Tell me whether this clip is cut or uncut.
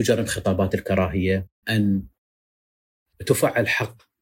cut